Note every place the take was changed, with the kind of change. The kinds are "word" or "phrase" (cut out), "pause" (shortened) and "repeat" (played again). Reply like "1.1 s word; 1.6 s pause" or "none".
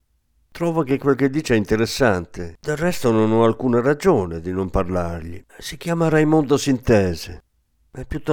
2.6 s pause; 5.5 s pause